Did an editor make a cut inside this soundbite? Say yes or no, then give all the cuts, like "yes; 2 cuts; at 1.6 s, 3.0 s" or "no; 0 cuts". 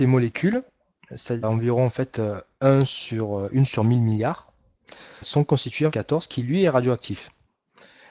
yes; 3 cuts; at 1.4 s, 5.2 s, 5.9 s